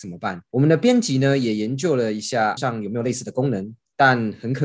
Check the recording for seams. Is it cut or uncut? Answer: cut